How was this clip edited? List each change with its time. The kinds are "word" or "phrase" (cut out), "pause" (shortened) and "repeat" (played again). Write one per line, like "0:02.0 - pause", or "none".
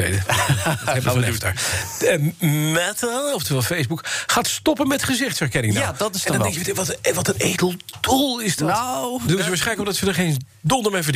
none